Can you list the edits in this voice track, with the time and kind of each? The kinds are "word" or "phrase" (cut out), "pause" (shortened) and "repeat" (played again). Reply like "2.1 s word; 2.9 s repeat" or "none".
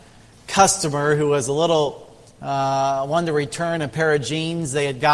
none